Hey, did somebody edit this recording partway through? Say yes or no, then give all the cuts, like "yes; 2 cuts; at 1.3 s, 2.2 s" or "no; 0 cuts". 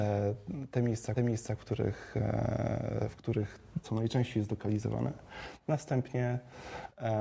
yes; 2 cuts; at 1.2 s, 3.8 s